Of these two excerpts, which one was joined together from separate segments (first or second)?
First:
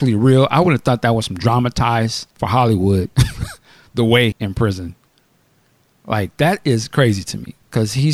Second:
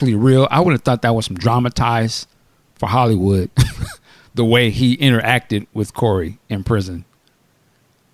first